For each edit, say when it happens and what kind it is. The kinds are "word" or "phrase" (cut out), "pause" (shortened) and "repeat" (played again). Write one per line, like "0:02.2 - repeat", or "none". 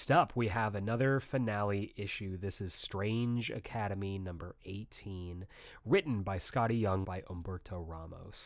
0:07.0 - phrase

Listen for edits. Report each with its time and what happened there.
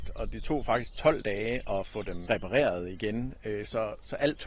0:02.3 - word

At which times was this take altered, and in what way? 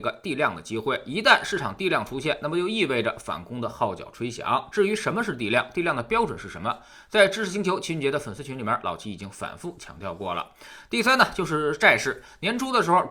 none

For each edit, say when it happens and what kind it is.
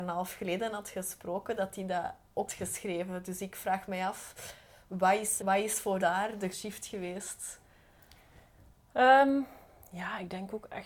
0:02.5 - word
0:05.4 - word
0:06.0 - word
0:06.5 - word

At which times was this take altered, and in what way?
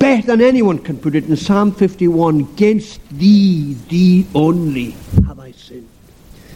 none

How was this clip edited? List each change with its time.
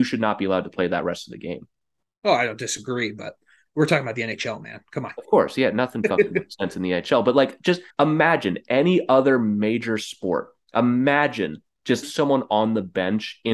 0:07.9 - pause
0:12.0 - word

